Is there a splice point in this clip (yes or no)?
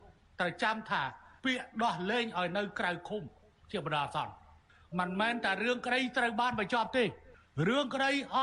yes